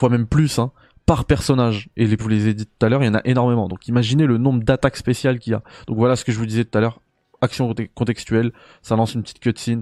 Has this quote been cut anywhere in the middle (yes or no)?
yes